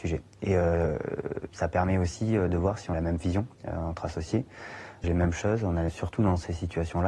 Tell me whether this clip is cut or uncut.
cut